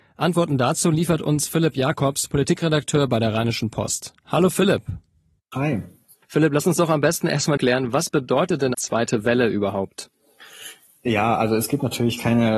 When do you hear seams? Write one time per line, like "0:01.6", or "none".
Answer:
0:06.2
0:07.6
0:08.7